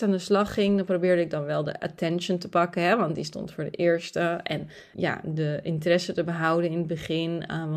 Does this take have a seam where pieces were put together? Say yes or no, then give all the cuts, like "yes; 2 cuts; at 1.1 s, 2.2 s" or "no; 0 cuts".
yes; 1 cut; at 4.9 s